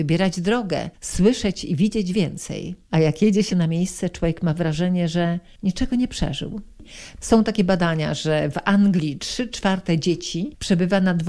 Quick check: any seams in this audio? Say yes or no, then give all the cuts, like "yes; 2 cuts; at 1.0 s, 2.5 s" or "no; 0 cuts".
yes; 3 cuts; at 0.9 s, 2.8 s, 3.5 s